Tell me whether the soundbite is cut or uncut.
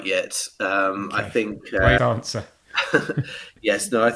cut